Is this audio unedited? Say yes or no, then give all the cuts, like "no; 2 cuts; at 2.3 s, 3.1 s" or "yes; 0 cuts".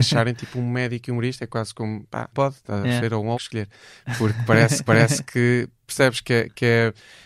no; 3 cuts; at 2.3 s, 3.3 s, 4.9 s